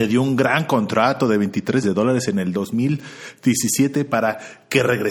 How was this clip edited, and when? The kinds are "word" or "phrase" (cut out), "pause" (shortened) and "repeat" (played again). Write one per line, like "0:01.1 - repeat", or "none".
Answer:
0:01.8 - word